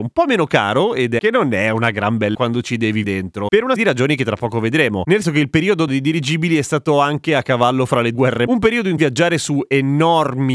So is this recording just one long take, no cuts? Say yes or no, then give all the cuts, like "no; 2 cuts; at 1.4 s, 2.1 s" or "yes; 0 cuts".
no; 9 cuts; at 1.2 s, 2.3 s, 3.0 s, 3.8 s, 5.2 s, 5.9 s, 8.1 s, 8.5 s, 9.0 s